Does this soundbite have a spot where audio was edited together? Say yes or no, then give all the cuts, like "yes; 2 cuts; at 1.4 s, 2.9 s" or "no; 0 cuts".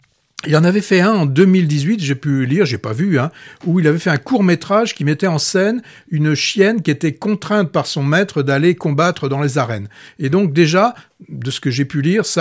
no; 0 cuts